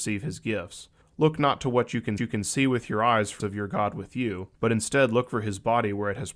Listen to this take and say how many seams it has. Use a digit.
4